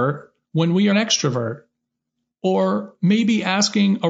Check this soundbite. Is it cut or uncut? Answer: cut